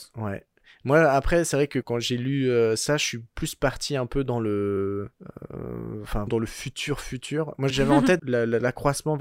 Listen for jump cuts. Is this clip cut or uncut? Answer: cut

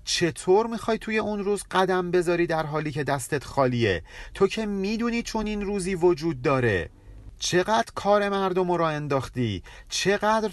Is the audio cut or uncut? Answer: uncut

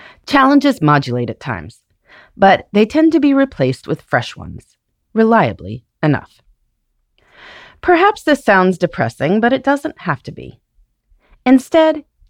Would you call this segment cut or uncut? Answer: uncut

